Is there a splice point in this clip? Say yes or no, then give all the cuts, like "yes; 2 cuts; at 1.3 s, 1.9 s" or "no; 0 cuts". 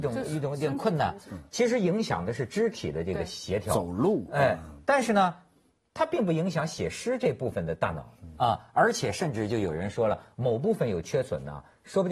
no; 0 cuts